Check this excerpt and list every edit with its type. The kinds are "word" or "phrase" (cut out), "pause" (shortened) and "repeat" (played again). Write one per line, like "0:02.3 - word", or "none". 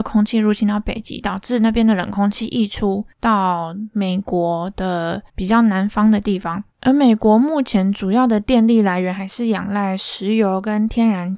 0:03.1 - pause
0:05.3 - pause
0:06.7 - pause